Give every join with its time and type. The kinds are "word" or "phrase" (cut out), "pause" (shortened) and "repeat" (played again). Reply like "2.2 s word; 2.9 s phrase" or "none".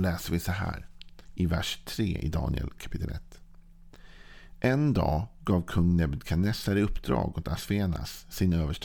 1.2 s pause